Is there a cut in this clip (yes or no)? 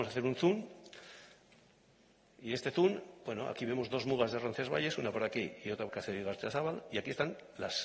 yes